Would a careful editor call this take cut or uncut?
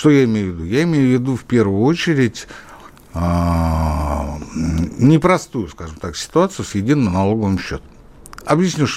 uncut